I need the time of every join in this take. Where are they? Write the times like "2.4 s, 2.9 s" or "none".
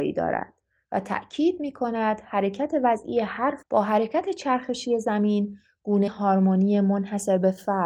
3.6 s, 6.1 s